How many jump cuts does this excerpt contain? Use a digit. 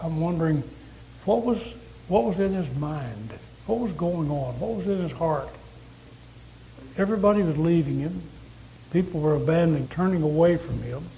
1